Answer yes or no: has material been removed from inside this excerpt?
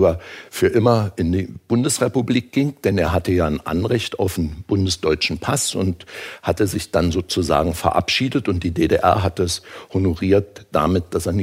no